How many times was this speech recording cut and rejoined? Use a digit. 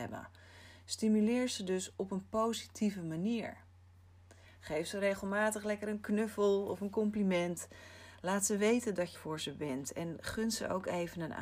1